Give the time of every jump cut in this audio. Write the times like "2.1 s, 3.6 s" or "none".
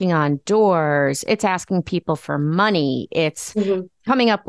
none